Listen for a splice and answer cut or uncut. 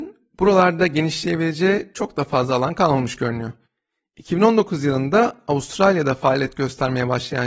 uncut